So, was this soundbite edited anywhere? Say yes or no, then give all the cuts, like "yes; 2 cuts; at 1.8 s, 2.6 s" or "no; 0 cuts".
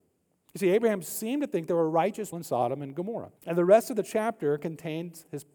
yes; 2 cuts; at 2.3 s, 3.4 s